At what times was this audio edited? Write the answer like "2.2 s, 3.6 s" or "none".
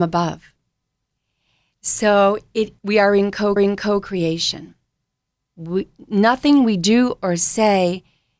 2.8 s, 3.6 s